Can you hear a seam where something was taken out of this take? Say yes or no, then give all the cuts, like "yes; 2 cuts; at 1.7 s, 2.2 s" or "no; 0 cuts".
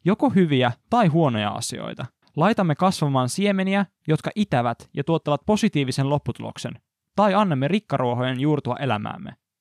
yes; 1 cut; at 2.2 s